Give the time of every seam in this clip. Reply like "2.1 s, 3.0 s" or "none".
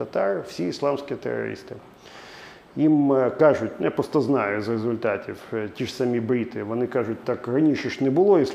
none